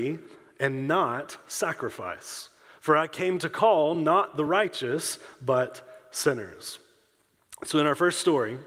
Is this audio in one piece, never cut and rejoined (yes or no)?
yes